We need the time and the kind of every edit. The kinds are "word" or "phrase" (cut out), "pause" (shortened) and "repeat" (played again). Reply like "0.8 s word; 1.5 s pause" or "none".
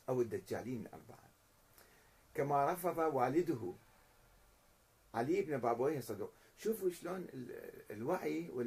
none